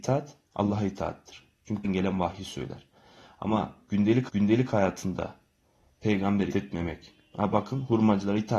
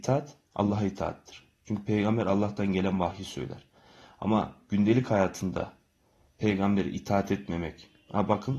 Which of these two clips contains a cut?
first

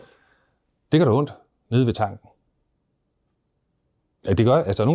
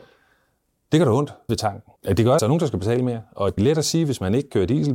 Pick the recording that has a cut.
second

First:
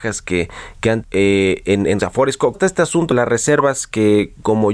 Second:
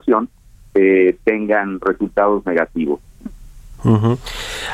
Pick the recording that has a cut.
first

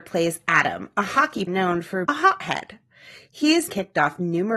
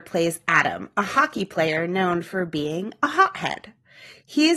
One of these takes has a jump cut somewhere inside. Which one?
first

